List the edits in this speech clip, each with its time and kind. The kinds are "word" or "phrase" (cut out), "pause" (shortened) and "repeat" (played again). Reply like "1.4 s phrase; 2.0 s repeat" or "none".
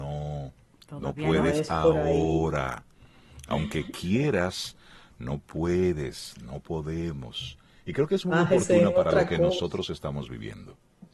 none